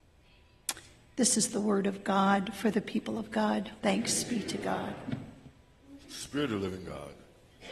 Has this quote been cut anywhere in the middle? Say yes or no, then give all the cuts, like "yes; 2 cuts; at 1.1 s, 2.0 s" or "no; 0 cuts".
yes; 2 cuts; at 3.8 s, 6.0 s